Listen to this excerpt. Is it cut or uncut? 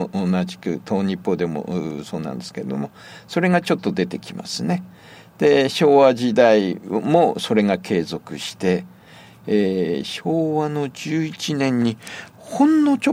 uncut